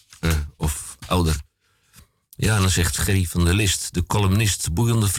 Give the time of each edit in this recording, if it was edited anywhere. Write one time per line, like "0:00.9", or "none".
none